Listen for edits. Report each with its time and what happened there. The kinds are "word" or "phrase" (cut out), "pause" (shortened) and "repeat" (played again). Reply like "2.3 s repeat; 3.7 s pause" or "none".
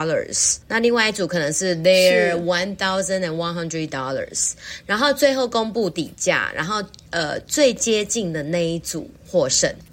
none